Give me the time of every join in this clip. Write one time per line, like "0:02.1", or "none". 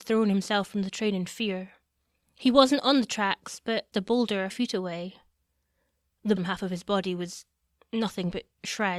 0:03.9
0:04.5
0:06.4